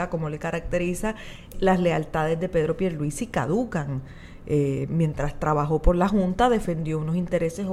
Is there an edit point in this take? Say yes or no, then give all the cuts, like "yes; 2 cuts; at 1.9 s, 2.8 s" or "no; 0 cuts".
yes; 1 cut; at 1.5 s